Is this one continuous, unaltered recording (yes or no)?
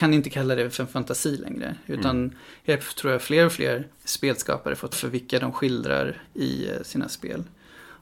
no